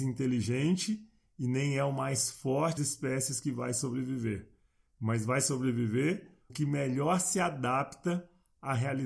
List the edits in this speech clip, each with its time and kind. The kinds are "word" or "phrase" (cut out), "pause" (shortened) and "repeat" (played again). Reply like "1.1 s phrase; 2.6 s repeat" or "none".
2.8 s word; 6.5 s word